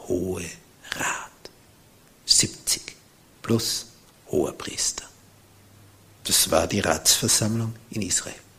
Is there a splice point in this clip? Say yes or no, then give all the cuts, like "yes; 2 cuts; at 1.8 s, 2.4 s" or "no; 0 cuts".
no; 0 cuts